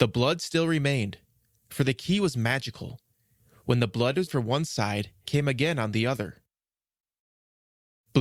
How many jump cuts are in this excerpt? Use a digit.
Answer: 2